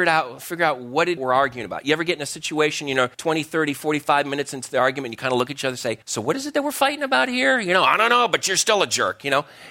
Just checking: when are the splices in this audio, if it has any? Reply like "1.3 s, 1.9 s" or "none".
1.2 s, 3.1 s, 6.0 s